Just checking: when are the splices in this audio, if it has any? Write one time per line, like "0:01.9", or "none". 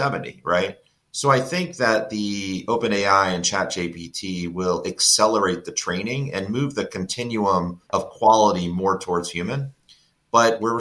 0:01.0
0:07.9